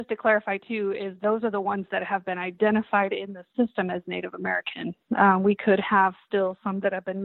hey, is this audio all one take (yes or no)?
yes